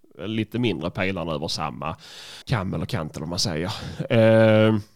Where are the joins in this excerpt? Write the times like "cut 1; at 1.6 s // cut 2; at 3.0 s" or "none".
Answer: cut 1; at 2.4 s